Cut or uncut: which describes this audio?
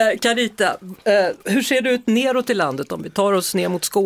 cut